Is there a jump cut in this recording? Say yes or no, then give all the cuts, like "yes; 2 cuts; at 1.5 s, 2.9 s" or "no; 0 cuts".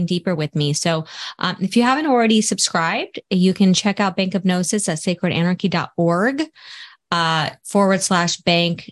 no; 0 cuts